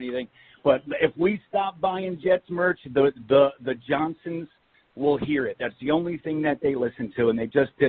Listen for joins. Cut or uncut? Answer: uncut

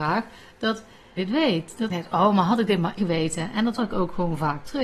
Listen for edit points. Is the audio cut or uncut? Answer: cut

